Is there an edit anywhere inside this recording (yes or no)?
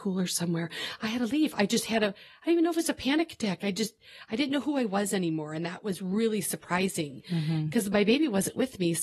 no